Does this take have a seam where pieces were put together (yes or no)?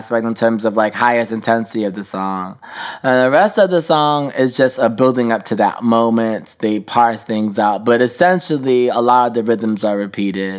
no